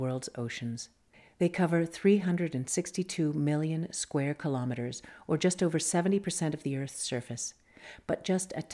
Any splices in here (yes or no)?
no